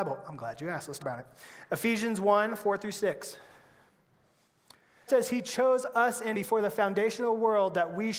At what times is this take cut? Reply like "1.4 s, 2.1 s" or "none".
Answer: 1.0 s, 5.1 s, 6.3 s